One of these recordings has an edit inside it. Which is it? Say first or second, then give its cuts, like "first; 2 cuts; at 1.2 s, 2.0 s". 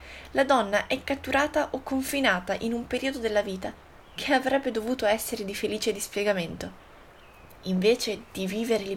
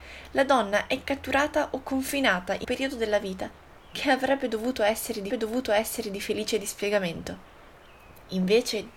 second; 2 cuts; at 2.6 s, 5.3 s